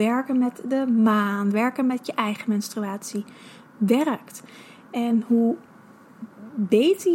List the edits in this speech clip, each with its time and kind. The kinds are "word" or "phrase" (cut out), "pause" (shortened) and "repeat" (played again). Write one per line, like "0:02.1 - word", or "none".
none